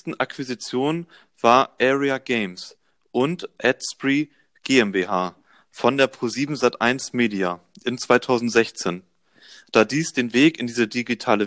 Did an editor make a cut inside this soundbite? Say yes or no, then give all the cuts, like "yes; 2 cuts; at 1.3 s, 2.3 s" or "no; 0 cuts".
no; 0 cuts